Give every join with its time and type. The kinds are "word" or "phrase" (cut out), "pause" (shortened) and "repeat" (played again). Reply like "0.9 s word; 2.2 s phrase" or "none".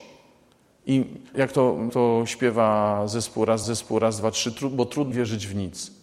1.3 s word; 1.9 s word; 3.6 s repeat; 5.1 s word